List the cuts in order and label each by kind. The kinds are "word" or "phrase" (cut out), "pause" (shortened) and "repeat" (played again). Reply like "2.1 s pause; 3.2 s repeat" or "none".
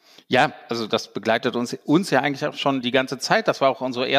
2.8 s word